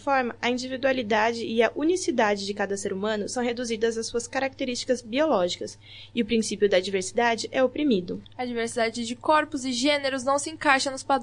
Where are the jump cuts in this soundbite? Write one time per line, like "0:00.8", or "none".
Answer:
0:08.2